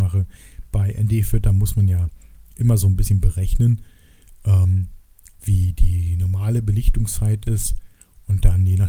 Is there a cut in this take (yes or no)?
no